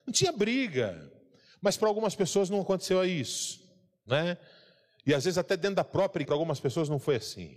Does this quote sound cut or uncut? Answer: cut